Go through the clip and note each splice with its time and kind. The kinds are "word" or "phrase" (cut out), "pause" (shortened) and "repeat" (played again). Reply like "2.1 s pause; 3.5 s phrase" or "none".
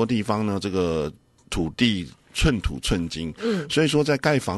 none

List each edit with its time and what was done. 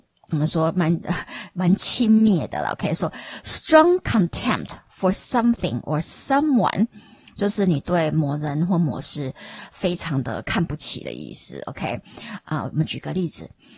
none

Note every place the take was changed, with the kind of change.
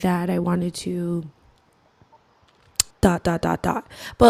2.9 s pause

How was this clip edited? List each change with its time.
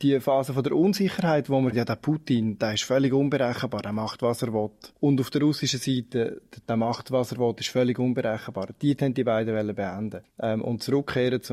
1.7 s word; 6.6 s word; 9.0 s word; 10.2 s pause

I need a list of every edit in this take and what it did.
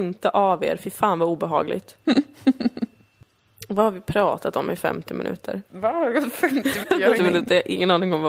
2.0 s pause; 5.6 s pause; 6.8 s word; 7.2 s word

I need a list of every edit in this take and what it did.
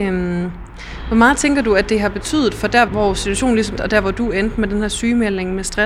2.9 s word; 3.8 s word

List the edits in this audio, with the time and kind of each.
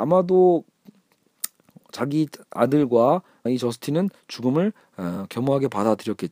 3.5 s word

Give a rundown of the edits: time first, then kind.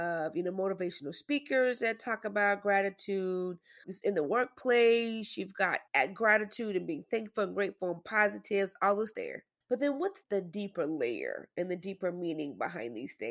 3.8 s word; 5.9 s pause; 9.1 s phrase; 9.6 s pause; 10.2 s word

